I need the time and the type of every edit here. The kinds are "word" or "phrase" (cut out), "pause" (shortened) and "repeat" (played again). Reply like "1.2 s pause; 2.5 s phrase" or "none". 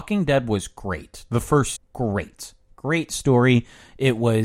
1.8 s word